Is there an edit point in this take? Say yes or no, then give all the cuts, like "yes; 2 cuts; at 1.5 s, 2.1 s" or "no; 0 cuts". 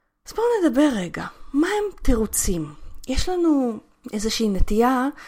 no; 0 cuts